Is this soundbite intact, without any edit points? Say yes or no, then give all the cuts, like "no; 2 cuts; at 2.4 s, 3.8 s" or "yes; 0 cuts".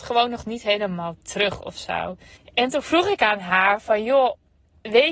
no; 1 cut; at 2.4 s